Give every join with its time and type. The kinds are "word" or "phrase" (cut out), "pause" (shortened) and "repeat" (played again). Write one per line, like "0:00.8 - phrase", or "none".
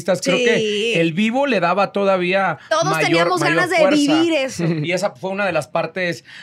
none